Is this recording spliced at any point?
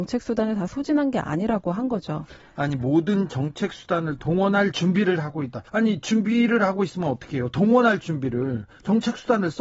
yes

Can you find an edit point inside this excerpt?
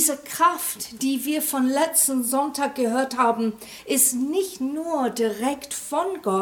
no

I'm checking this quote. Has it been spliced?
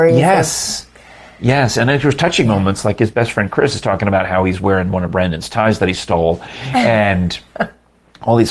no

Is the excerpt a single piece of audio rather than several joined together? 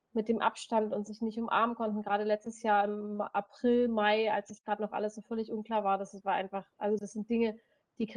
yes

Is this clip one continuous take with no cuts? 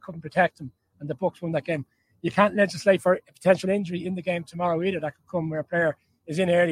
yes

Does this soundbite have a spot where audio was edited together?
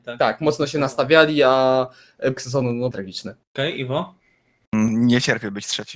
yes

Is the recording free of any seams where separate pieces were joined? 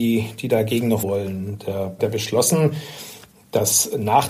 no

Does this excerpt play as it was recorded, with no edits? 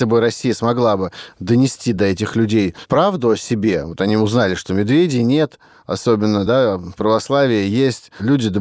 yes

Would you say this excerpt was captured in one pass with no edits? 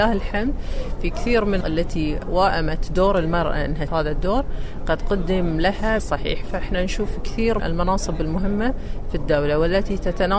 no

